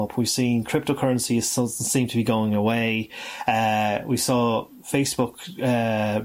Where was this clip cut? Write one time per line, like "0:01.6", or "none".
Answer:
none